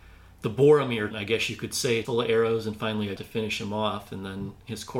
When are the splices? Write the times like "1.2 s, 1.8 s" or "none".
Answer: 1.1 s, 2.0 s, 3.2 s